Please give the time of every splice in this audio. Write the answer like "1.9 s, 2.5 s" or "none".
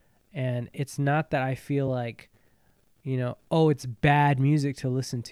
none